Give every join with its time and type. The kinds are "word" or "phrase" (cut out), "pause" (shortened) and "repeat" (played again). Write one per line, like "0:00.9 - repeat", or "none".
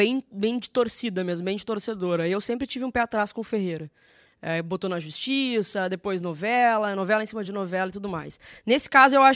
none